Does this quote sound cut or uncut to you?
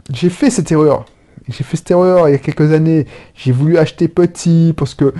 uncut